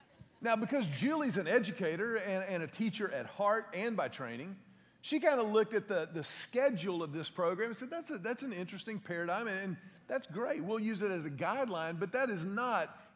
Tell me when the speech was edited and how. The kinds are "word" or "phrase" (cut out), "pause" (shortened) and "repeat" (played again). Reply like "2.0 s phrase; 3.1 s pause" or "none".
none